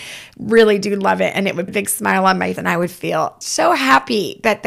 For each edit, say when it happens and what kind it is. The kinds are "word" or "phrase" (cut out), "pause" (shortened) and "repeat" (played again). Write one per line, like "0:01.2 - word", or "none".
0:01.7 - word
0:02.6 - word
0:03.4 - word